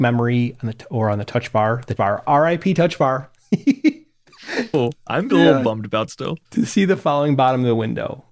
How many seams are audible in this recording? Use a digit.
4